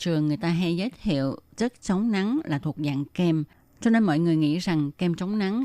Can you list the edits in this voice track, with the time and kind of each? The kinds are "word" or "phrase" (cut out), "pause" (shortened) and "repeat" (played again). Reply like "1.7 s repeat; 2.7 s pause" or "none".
none